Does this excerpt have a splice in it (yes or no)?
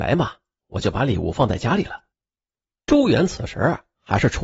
yes